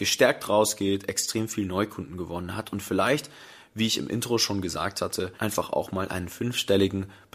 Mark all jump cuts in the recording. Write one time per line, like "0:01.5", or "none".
0:05.4